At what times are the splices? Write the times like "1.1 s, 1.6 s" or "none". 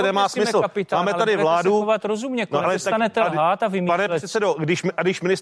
2.6 s